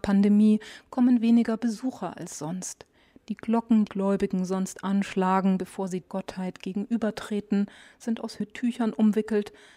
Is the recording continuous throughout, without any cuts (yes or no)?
no